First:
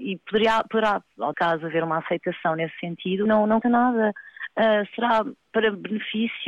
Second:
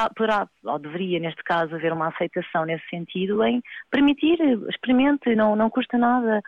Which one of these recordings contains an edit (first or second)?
first